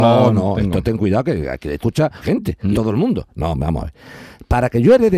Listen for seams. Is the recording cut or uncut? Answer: cut